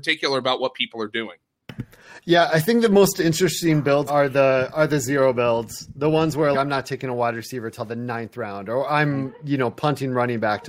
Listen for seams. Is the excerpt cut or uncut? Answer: cut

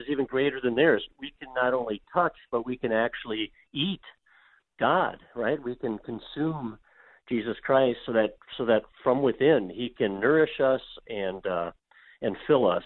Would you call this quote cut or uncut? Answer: uncut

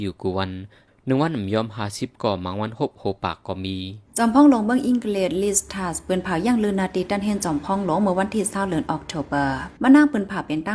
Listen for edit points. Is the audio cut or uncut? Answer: cut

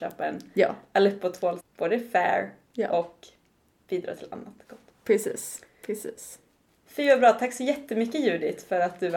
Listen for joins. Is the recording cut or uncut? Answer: cut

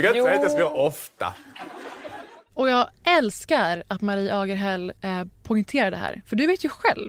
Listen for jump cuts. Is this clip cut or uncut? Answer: cut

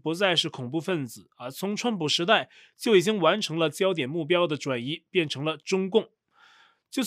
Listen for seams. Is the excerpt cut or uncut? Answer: uncut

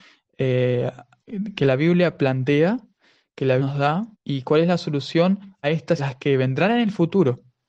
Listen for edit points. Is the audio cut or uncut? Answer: cut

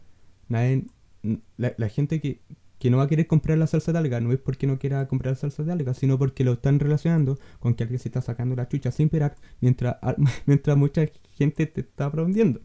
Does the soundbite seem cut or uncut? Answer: cut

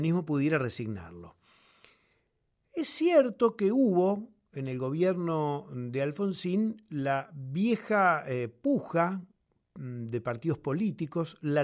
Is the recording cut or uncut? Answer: uncut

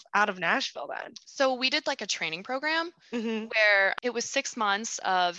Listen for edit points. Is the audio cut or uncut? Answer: uncut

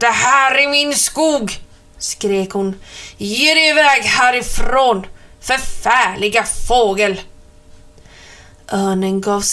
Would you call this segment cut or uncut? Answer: uncut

